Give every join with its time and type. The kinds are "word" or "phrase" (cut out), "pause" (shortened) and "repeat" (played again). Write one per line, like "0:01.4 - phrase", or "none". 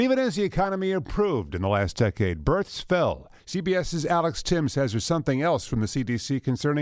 0:03.4 - pause

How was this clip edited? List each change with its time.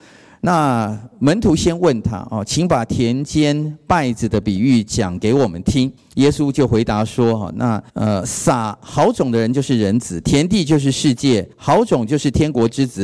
0:06.0 - pause
0:07.9 - pause
0:11.5 - pause

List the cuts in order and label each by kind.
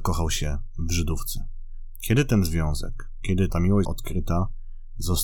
0:03.5 - word
0:03.8 - word

